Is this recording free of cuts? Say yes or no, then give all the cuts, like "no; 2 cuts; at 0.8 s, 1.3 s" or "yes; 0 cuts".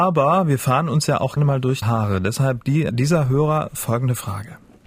no; 3 cuts; at 1.4 s, 1.8 s, 2.9 s